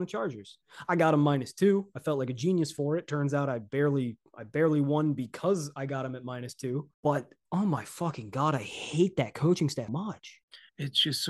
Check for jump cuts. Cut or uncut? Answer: cut